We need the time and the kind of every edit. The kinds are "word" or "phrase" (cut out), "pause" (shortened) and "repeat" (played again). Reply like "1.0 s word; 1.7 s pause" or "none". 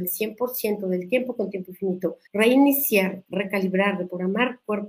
2.3 s pause